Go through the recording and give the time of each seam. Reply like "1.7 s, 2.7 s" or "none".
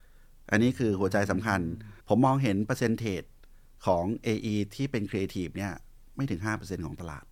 2.0 s